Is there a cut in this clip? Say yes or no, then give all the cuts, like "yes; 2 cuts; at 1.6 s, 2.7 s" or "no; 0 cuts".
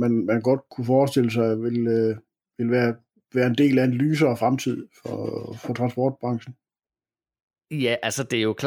no; 0 cuts